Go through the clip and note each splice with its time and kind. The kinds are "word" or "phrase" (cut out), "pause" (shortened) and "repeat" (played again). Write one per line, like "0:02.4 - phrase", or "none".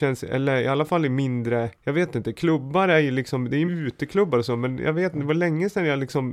0:01.7 - pause
0:03.7 - word